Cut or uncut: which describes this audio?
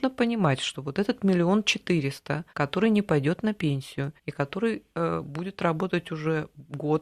cut